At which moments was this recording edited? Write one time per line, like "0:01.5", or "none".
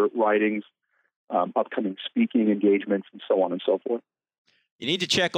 none